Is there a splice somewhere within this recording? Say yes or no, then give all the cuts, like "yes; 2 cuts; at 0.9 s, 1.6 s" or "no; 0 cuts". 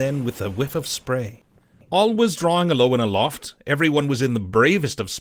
no; 0 cuts